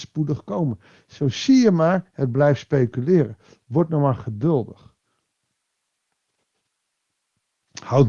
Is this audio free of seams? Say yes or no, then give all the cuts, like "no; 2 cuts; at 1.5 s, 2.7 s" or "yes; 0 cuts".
yes; 0 cuts